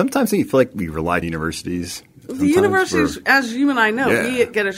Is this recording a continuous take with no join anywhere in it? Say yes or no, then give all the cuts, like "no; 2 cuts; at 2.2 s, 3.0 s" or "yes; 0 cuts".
no; 1 cut; at 1.2 s